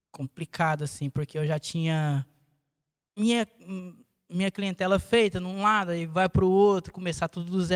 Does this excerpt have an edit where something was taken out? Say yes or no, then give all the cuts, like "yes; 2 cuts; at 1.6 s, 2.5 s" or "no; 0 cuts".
no; 0 cuts